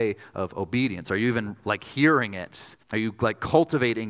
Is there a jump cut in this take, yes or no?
yes